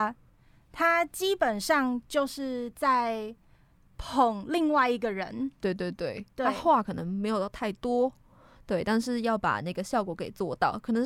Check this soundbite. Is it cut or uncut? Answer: uncut